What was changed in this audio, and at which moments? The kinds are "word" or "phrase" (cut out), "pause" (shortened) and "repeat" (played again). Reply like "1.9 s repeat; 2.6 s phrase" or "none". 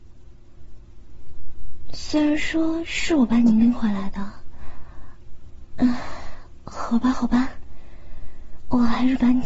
none